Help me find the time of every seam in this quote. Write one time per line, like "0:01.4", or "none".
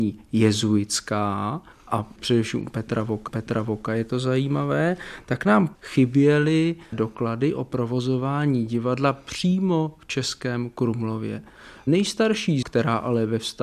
0:01.7
0:03.3
0:05.7
0:06.9
0:12.6